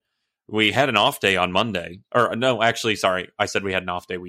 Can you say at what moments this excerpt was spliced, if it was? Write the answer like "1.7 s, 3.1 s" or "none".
none